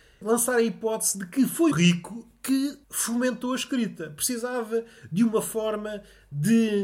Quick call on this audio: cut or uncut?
cut